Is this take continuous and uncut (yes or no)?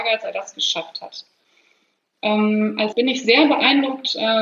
no